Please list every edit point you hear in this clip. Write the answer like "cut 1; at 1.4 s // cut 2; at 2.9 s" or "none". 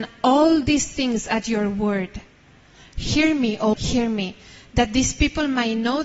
cut 1; at 3.7 s

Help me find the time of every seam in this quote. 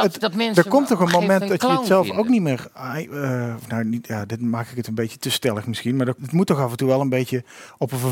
cut 1; at 6.2 s

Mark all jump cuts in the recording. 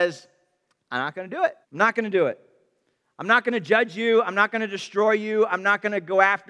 cut 1; at 1.6 s

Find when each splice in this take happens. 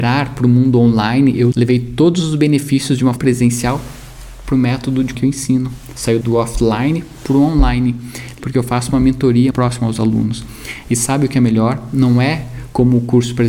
cut 1; at 1.5 s // cut 2; at 3.2 s // cut 3; at 5.1 s // cut 4; at 6.2 s // cut 5; at 8.4 s // cut 6; at 9.5 s

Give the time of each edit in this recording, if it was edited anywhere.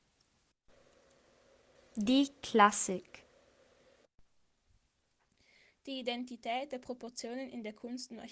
none

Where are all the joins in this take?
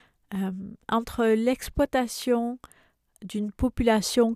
none

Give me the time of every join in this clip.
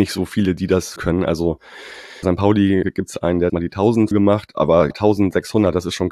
cut 1; at 1.0 s // cut 2; at 2.2 s // cut 3; at 2.8 s // cut 4; at 3.5 s // cut 5; at 4.1 s // cut 6; at 4.9 s

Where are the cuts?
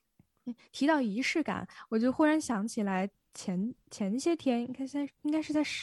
none

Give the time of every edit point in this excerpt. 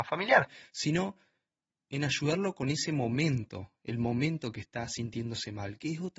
none

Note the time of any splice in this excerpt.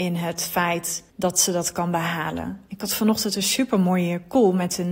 cut 1; at 1.1 s

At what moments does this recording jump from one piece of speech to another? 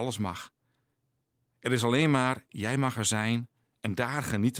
none

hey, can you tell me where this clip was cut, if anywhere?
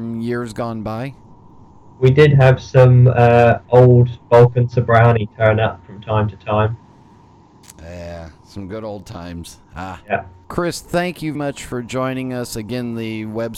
cut 1; at 8.4 s // cut 2; at 9.6 s // cut 3; at 10.4 s // cut 4; at 11.3 s

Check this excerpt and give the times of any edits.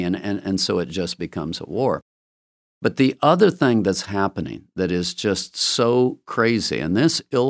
none

